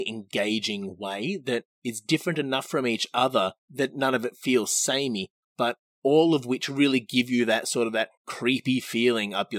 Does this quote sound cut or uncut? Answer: cut